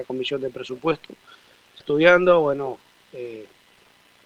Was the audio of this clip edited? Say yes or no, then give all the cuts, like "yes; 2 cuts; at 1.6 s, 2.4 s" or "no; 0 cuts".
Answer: yes; 1 cut; at 1.8 s